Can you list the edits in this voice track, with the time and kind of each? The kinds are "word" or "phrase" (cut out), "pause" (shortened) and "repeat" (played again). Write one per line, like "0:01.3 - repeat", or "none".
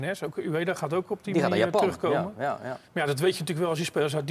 0:02.8 - pause